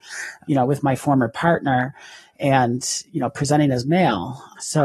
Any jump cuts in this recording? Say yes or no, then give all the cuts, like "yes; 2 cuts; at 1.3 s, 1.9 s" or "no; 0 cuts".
no; 0 cuts